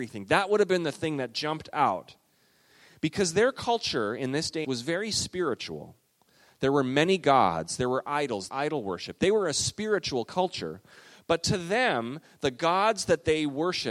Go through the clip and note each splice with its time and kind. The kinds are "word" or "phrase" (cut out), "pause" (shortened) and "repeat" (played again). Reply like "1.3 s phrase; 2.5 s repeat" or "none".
4.6 s phrase; 8.5 s phrase